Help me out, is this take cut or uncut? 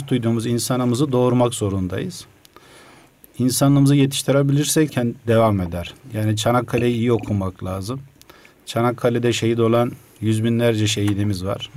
cut